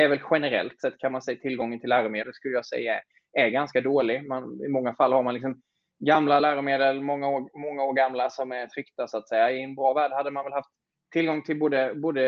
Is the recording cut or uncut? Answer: uncut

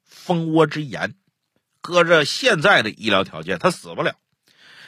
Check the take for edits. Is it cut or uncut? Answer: uncut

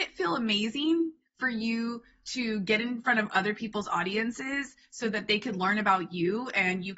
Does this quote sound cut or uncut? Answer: uncut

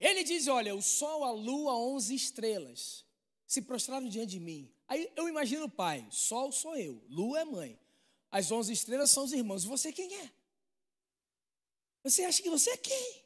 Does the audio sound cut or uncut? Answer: uncut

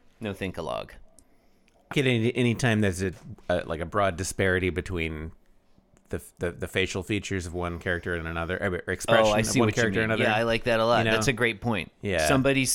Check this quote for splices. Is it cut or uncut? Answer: cut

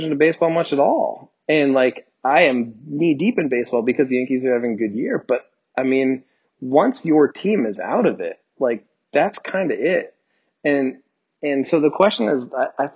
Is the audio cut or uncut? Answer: uncut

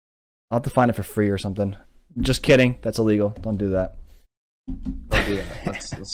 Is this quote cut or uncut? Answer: uncut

